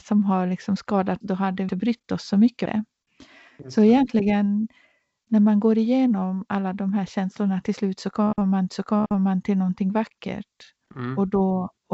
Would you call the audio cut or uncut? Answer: cut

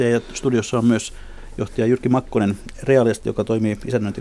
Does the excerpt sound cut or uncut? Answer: uncut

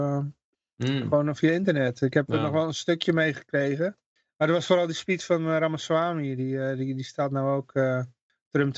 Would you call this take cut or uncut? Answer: uncut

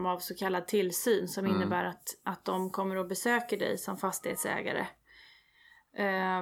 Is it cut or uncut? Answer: uncut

